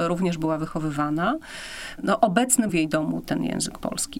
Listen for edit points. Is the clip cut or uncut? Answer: cut